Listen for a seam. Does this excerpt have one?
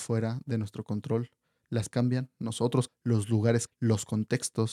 yes; 3 cuts; at 1.9 s, 2.9 s, 3.7 s

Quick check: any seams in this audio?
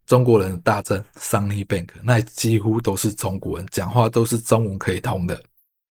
no; 0 cuts

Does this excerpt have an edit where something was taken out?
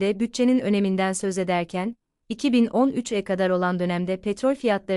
no; 0 cuts

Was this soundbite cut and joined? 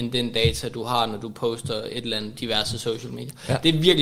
yes; 1 cut; at 2.3 s

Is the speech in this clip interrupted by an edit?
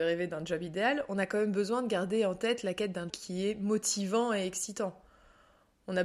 yes; 1 cut; at 3.1 s

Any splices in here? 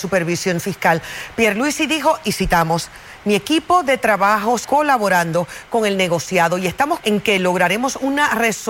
yes; 2 cuts; at 4.6 s, 7.0 s

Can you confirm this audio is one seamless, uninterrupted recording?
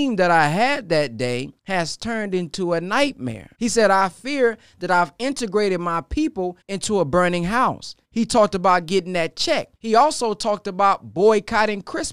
no; 5 cuts; at 1.6 s, 3.5 s, 6.6 s, 8.0 s, 9.7 s

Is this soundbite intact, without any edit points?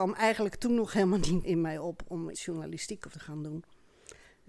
no; 3 cuts; at 1.4 s, 2.3 s, 3.1 s

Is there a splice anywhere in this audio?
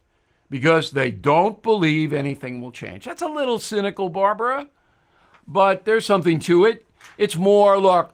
no; 0 cuts

